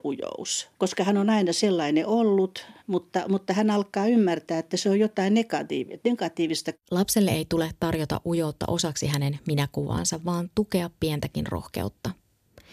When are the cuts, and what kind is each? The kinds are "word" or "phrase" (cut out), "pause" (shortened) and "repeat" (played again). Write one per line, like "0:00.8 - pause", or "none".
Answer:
0:02.8 - pause
0:06.8 - pause